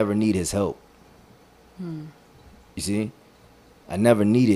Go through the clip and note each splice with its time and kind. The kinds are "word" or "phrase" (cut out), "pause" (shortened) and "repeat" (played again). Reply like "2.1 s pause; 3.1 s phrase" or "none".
none